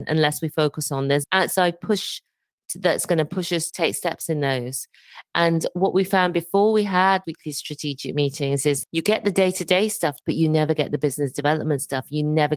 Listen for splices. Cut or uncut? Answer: cut